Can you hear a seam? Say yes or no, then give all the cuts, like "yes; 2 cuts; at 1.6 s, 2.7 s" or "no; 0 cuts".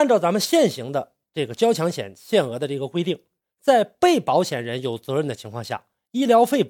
no; 0 cuts